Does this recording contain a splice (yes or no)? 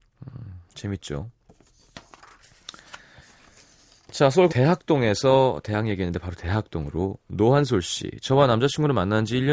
yes